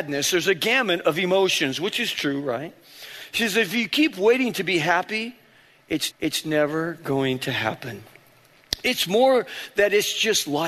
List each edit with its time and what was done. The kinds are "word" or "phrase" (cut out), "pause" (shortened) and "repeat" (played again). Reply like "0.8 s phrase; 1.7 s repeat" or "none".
6.1 s repeat